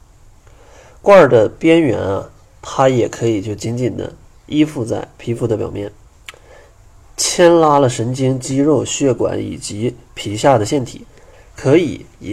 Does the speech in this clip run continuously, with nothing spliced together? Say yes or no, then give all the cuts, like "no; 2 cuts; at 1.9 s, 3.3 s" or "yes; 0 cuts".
yes; 0 cuts